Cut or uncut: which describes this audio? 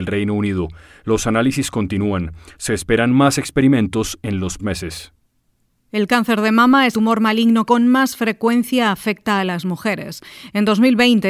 cut